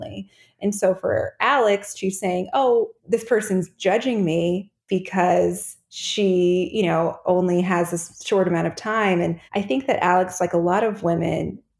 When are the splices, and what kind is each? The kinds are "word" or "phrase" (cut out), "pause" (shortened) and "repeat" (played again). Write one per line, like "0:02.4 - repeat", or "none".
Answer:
0:03.0 - pause
0:09.5 - pause